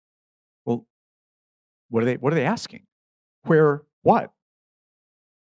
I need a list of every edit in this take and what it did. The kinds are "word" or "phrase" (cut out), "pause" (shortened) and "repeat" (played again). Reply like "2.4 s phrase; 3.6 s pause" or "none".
none